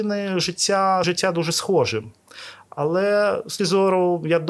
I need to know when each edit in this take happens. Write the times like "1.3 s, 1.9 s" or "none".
1.0 s, 3.6 s